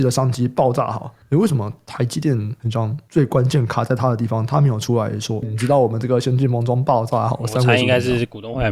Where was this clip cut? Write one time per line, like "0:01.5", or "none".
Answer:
0:05.4